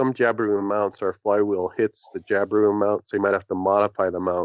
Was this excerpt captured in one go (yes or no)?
yes